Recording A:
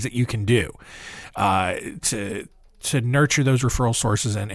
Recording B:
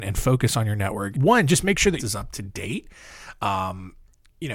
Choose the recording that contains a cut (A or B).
B